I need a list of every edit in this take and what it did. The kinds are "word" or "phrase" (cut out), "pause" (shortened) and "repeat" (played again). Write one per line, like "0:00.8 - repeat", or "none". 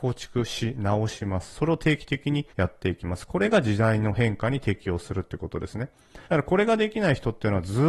0:02.5 - pause
0:06.2 - pause